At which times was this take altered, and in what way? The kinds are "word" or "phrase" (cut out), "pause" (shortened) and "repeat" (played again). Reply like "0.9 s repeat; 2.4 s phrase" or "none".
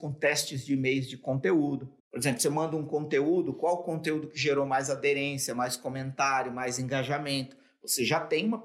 2.0 s pause